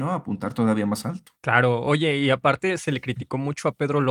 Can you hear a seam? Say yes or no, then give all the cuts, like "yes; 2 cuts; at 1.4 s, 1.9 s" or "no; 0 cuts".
yes; 1 cut; at 1.4 s